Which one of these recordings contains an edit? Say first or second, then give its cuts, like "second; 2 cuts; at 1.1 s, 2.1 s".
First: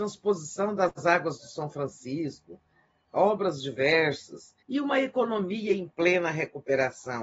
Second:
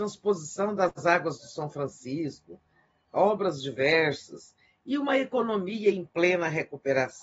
first; 1 cut; at 4.6 s